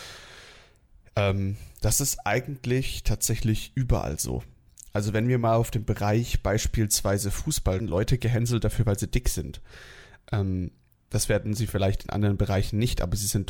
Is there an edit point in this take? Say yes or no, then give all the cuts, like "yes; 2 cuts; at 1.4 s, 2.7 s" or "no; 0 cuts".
yes; 1 cut; at 7.8 s